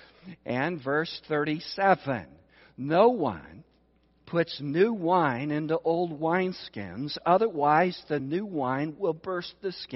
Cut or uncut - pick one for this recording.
uncut